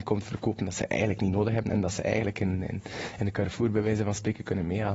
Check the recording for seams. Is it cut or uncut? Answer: uncut